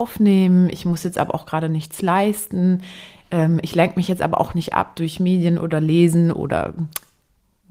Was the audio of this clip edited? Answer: no; 0 cuts

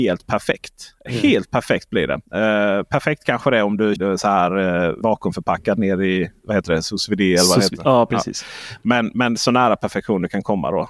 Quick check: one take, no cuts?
no; 4 cuts; at 2.2 s, 4.0 s, 5.0 s, 6.4 s

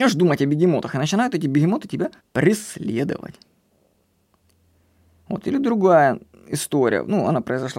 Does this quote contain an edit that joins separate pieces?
yes; 1 cut; at 2.2 s

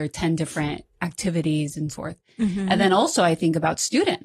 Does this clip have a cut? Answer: yes; 1 cut; at 1.9 s

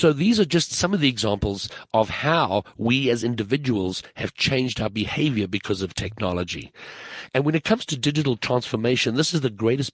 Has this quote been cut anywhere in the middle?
no; 0 cuts

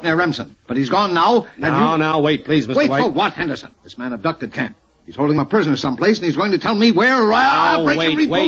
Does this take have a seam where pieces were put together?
yes; 1 cut; at 3.7 s

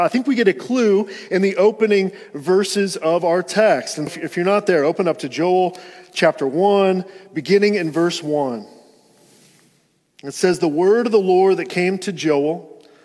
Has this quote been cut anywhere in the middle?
yes; 1 cut; at 4.1 s

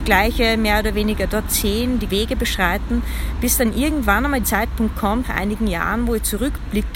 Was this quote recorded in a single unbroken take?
no; 3 cuts; at 2.1 s, 4.4 s, 5.2 s

